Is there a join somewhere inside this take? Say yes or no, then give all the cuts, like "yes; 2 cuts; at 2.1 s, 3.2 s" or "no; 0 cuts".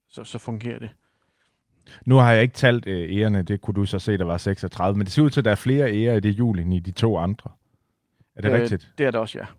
yes; 1 cut; at 3.5 s